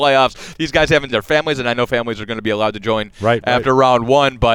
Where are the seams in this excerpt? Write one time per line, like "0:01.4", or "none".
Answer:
0:01.1